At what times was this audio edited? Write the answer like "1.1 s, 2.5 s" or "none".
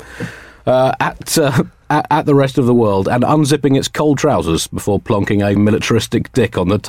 4.2 s, 5.5 s